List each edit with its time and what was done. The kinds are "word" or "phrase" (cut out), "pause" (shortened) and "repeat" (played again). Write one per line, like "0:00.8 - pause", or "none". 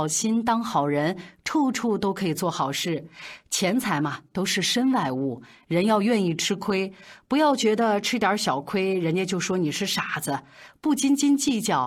none